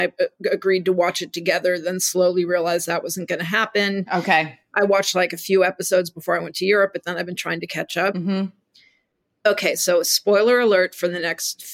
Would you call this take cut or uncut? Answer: uncut